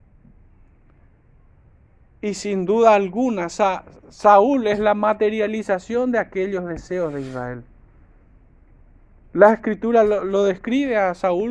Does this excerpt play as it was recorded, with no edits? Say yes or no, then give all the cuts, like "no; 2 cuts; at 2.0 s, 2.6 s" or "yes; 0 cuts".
yes; 0 cuts